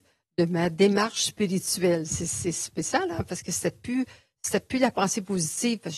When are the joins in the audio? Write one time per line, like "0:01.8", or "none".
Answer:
none